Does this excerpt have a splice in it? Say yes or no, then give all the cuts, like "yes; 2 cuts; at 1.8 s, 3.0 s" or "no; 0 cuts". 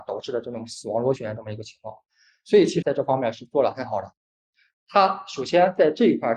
yes; 1 cut; at 2.8 s